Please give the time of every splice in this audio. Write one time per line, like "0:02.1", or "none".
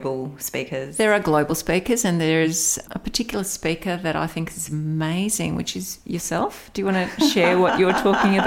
none